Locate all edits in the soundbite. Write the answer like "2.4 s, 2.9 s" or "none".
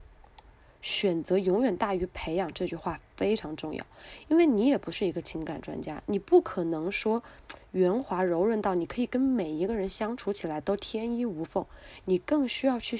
none